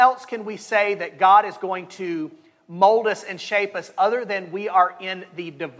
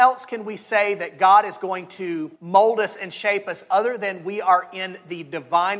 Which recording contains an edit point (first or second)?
second